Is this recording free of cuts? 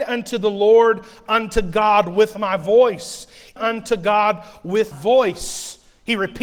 no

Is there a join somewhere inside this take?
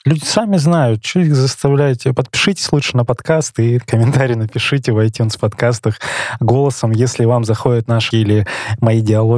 yes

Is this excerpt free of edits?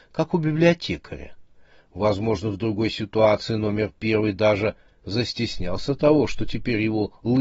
yes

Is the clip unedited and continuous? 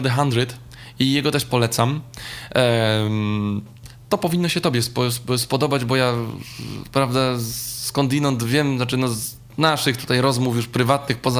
yes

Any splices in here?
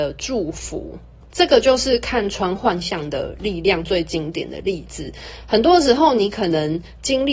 yes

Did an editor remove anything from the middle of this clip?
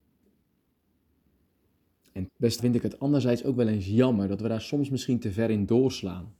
yes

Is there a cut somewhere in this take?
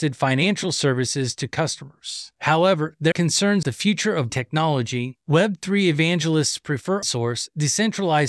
yes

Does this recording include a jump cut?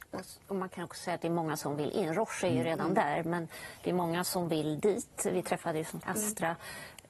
yes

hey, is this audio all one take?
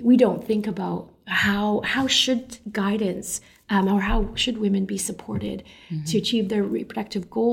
yes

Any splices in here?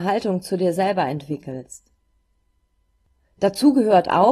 no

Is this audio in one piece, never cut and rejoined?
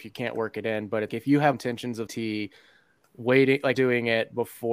no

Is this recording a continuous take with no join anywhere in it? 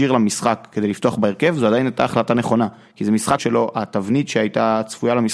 no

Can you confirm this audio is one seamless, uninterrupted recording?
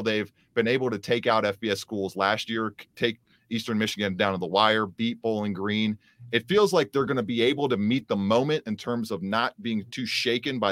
yes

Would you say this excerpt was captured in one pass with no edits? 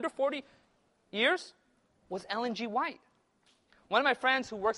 yes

